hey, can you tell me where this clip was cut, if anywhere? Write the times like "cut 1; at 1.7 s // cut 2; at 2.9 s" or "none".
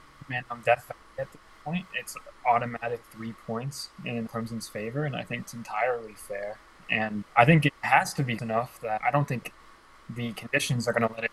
cut 1; at 4.3 s // cut 2; at 5.5 s // cut 3; at 7.2 s // cut 4; at 8.4 s // cut 5; at 9.0 s